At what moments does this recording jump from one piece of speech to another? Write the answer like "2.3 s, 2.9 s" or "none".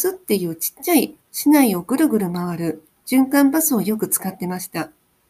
1.2 s